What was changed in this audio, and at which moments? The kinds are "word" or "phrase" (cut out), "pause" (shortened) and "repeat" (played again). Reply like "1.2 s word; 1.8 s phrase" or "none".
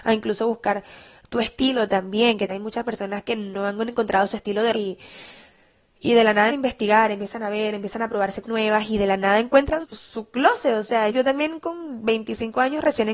2.5 s word; 4.7 s word; 6.5 s word; 8.4 s word; 9.8 s word; 11.1 s word

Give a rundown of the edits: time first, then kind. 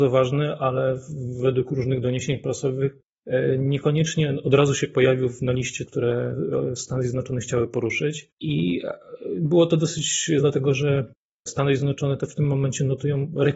5.9 s word; 8.3 s pause; 10.4 s word

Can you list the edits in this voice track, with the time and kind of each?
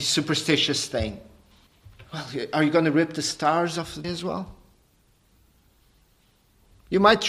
1.7 s pause; 4.0 s word

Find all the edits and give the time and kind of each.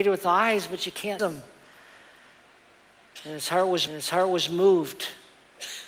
1.2 s word; 3.9 s repeat

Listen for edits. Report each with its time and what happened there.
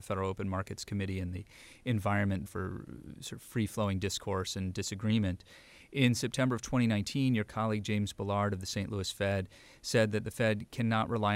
2.5 s word

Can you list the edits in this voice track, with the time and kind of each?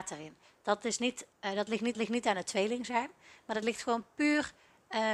1.3 s pause; 1.9 s repeat

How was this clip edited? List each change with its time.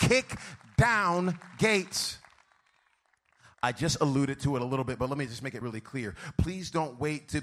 5.6 s word

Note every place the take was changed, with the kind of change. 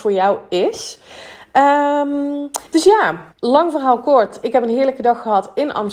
2.7 s pause; 3.3 s pause

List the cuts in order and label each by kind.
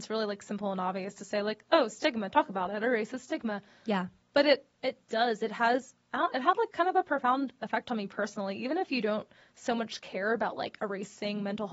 none

